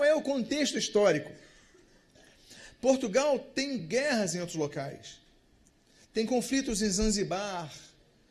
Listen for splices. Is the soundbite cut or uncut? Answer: uncut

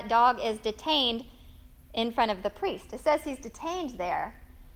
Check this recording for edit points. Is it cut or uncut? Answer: uncut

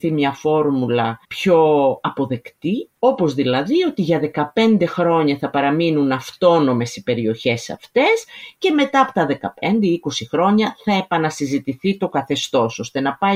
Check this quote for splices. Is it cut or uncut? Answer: cut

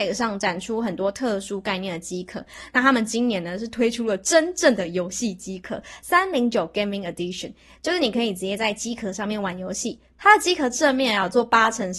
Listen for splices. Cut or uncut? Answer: uncut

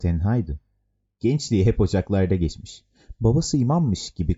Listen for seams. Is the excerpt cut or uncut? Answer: uncut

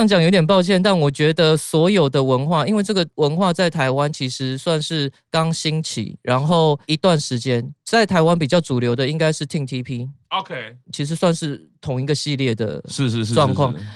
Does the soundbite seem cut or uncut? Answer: uncut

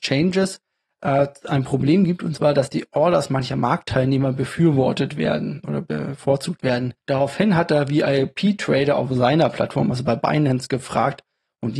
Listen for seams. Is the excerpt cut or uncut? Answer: cut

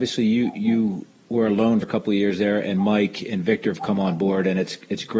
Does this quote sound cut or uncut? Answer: cut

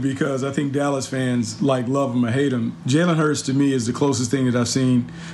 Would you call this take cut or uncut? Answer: uncut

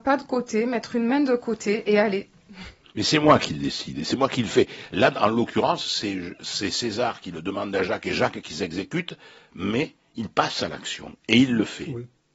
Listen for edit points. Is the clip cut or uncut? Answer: uncut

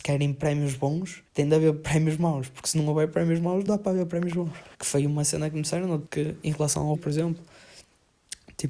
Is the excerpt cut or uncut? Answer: cut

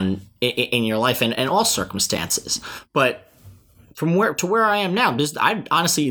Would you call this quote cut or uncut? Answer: uncut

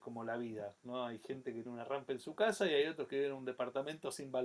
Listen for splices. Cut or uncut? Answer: cut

